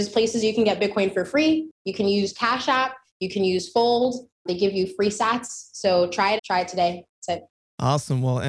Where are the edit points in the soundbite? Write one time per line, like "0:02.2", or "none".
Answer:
0:01.7
0:06.4